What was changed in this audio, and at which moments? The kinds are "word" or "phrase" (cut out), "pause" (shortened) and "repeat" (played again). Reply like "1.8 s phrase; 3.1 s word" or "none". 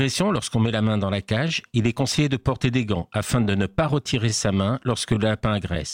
none